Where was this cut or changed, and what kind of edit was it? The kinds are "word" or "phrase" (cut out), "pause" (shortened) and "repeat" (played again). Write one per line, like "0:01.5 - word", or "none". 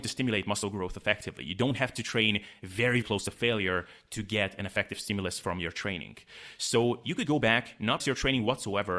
0:03.0 - word
0:07.3 - word
0:08.0 - word